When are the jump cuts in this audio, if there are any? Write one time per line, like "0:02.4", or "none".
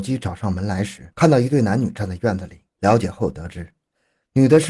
0:01.1
0:02.7